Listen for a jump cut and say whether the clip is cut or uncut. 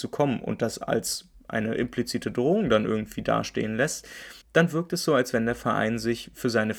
cut